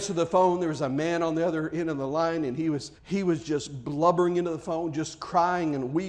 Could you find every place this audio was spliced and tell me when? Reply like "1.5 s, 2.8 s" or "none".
3.0 s